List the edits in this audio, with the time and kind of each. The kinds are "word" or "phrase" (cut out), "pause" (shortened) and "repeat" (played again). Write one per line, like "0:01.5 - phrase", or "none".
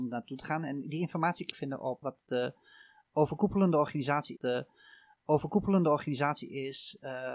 0:01.5 - phrase
0:02.0 - word
0:04.4 - repeat